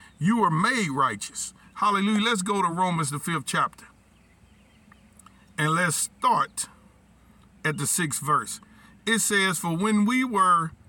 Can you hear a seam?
no; 0 cuts

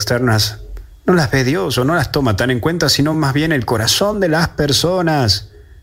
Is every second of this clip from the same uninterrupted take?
yes; 0 cuts

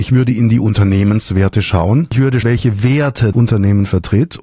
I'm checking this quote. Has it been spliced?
yes; 2 cuts; at 2.4 s, 3.3 s

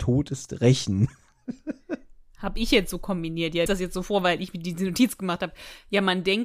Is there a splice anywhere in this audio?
yes; 1 cut; at 3.7 s

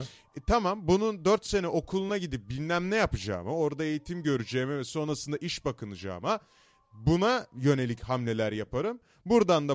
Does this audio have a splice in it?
no; 0 cuts

